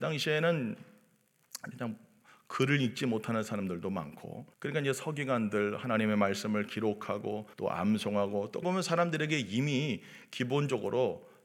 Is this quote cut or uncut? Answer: cut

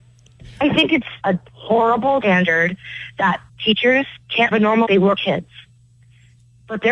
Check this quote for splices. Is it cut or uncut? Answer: cut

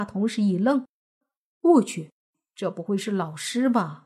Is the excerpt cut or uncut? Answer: uncut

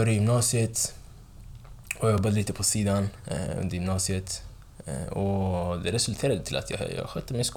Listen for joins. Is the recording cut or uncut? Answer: uncut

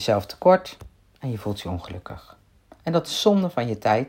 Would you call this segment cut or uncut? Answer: uncut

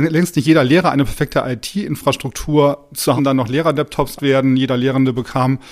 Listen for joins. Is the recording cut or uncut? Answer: cut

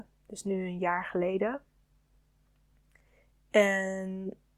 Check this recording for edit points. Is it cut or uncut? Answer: uncut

